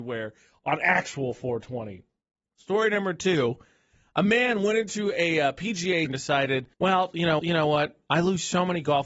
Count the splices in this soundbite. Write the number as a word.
four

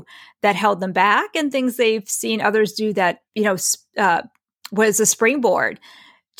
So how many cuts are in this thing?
one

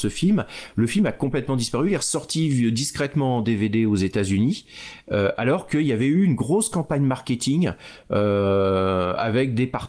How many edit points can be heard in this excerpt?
zero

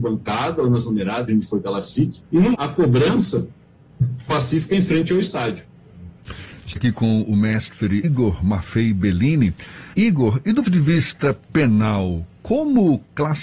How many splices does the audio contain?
nine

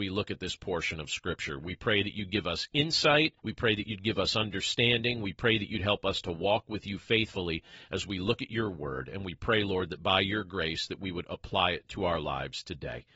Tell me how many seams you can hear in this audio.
one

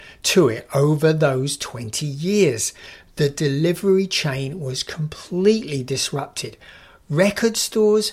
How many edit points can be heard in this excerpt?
zero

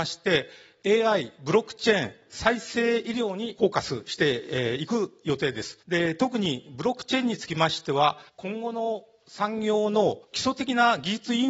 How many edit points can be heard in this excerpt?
three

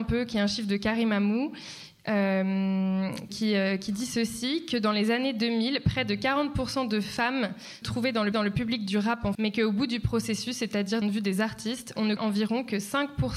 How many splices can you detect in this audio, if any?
six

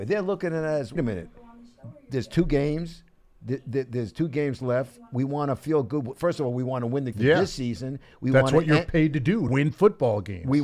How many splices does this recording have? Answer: three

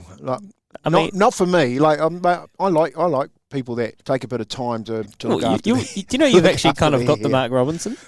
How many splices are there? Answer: one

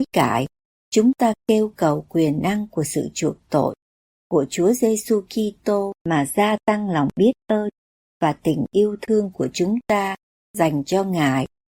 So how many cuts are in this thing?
one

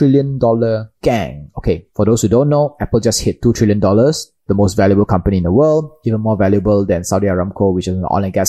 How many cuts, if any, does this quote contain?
two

